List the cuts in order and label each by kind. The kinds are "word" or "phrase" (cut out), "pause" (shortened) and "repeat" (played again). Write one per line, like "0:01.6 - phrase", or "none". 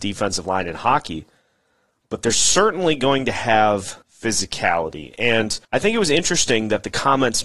0:04.0 - pause
0:05.6 - pause